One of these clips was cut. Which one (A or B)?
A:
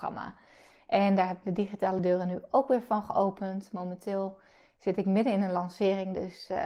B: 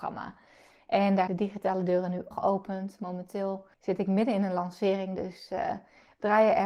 B